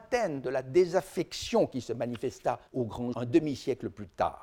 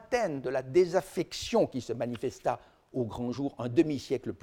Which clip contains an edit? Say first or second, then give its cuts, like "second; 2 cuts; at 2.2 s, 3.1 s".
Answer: first; 2 cuts; at 2.7 s, 3.1 s